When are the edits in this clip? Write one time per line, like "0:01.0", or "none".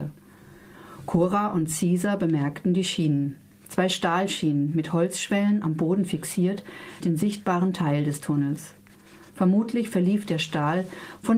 0:07.0